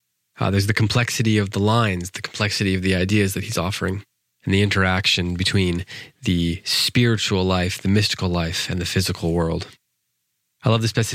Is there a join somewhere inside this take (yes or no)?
no